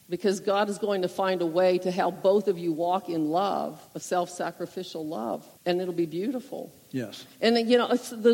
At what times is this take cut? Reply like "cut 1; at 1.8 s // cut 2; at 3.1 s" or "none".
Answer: cut 1; at 3.8 s // cut 2; at 5.5 s